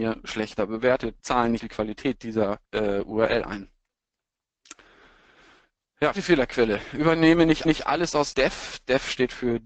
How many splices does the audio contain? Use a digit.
6